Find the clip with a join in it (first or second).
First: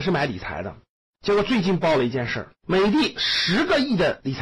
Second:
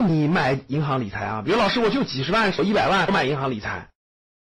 first